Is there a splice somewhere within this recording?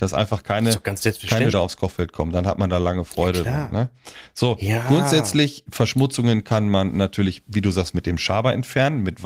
yes; 2 cuts; at 1.5 s, 5.7 s

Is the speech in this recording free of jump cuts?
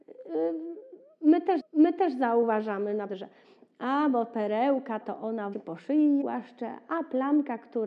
no; 5 cuts; at 1.6 s, 3.1 s, 5.0 s, 5.5 s, 6.2 s

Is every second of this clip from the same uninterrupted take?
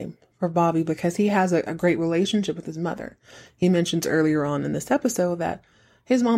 yes; 0 cuts

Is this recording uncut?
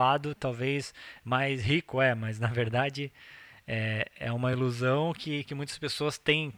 yes; 0 cuts

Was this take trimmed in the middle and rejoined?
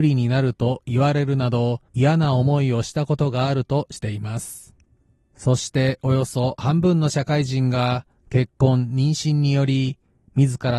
yes; 1 cut; at 1.9 s

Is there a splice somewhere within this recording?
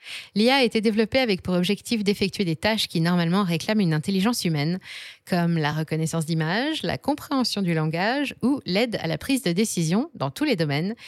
no; 0 cuts

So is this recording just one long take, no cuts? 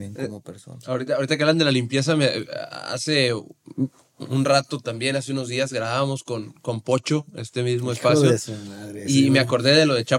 yes; 0 cuts

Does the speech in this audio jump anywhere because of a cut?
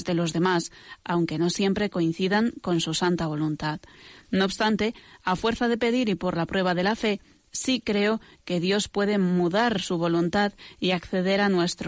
no; 0 cuts

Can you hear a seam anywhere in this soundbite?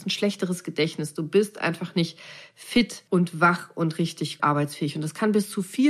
yes; 2 cuts; at 3.1 s, 4.4 s

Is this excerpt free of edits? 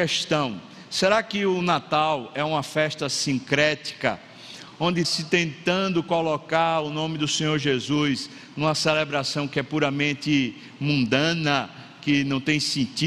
no; 1 cut; at 5.0 s

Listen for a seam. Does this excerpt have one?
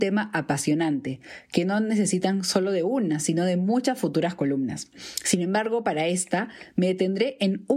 no; 0 cuts

